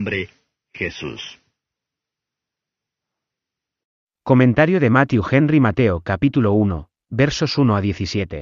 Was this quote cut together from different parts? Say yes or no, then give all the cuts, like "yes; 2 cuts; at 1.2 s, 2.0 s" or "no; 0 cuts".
no; 0 cuts